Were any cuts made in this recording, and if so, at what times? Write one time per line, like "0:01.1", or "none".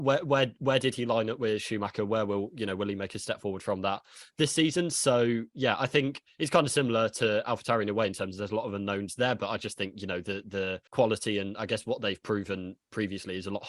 0:10.9

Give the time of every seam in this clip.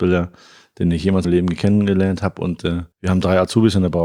0:01.2
0:02.9

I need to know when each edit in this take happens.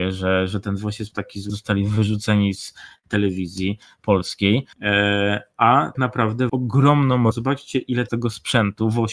0:01.5
0:04.7
0:05.9
0:06.5
0:07.3
0:08.1

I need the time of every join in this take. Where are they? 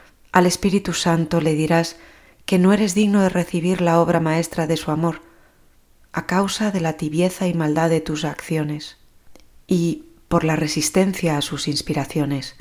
none

